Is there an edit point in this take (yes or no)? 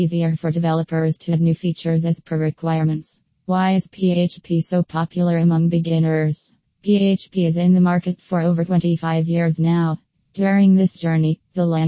no